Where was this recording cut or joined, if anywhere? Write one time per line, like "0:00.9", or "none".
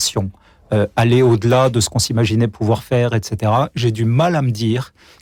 none